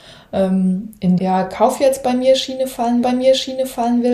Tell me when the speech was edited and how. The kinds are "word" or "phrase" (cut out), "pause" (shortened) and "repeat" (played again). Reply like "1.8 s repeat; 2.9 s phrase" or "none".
1.2 s word; 3.0 s repeat